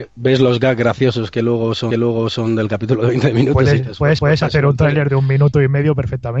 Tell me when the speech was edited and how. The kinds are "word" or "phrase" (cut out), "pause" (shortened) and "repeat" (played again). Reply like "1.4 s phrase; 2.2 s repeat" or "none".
1.9 s repeat; 4.2 s repeat